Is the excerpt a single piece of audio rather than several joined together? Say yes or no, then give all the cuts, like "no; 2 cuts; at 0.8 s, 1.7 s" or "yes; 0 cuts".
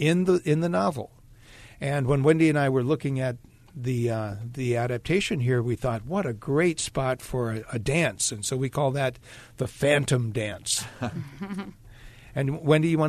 yes; 0 cuts